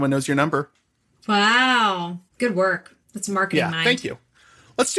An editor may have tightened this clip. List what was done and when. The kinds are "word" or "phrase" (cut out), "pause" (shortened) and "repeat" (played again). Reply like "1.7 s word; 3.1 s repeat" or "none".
2.3 s pause; 3.0 s pause